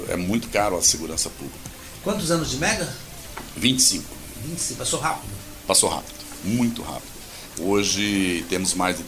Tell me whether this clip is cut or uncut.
uncut